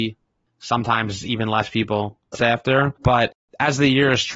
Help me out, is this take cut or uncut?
cut